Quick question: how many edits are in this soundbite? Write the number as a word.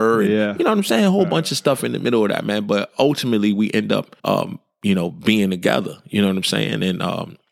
one